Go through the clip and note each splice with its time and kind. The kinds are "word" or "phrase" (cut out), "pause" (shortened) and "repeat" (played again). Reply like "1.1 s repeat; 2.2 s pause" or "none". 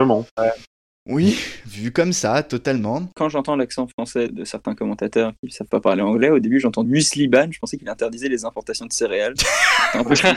4.3 s word; 6.9 s word